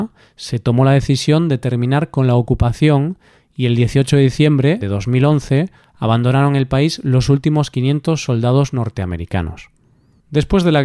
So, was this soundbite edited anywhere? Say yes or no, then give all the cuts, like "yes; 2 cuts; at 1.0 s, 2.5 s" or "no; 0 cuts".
yes; 1 cut; at 4.8 s